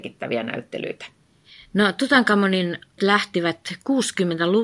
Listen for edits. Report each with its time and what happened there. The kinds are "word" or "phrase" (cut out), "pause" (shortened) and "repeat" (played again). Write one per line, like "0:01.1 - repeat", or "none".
0:03.0 - word